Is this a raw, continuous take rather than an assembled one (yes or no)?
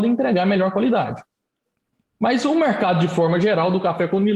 yes